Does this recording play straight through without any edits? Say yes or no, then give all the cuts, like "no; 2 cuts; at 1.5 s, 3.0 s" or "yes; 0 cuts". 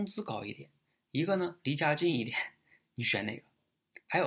yes; 0 cuts